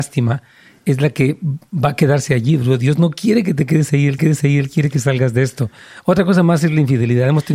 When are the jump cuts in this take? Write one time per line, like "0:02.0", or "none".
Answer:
0:04.2